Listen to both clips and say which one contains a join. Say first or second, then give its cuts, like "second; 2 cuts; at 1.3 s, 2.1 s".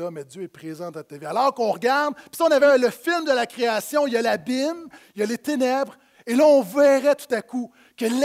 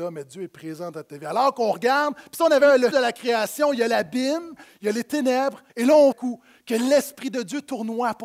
second; 3 cuts; at 2.9 s, 5.7 s, 6.1 s